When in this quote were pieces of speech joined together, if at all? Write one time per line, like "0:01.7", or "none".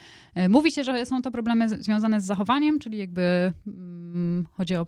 none